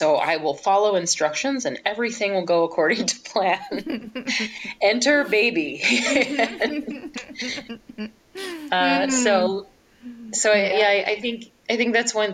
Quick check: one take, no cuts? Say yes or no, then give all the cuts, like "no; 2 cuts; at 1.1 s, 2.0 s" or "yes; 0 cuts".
yes; 0 cuts